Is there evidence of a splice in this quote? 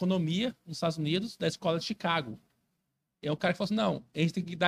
no; 0 cuts

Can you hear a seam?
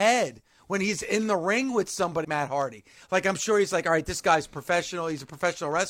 yes; 1 cut; at 2.2 s

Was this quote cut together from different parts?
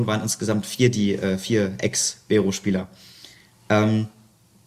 no; 0 cuts

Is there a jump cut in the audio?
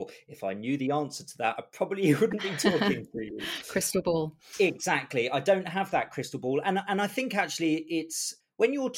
no; 0 cuts

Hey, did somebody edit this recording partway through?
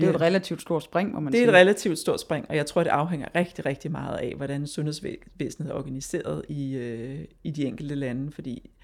no; 0 cuts

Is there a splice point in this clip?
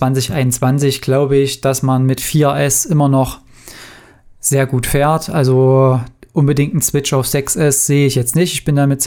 no; 0 cuts

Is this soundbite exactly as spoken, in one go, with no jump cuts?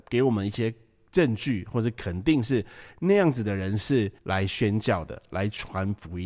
no; 1 cut; at 4.2 s

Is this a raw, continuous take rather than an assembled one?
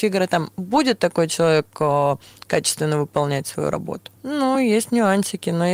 yes; 0 cuts

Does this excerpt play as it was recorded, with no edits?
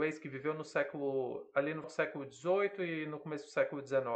no; 1 cut; at 1.8 s

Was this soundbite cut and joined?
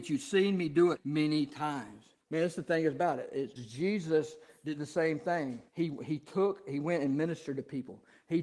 yes; 4 cuts; at 1.0 s, 2.2 s, 3.6 s, 5.7 s

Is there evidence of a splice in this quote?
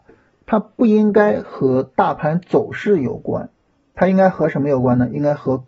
no; 0 cuts

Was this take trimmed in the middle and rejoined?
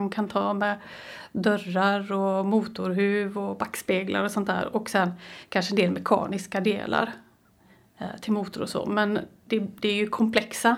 no; 0 cuts

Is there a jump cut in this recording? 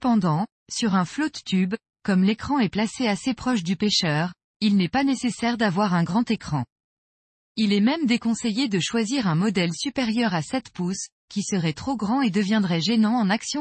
no; 0 cuts

